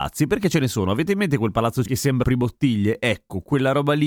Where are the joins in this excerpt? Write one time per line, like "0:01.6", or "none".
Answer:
0:01.9
0:02.2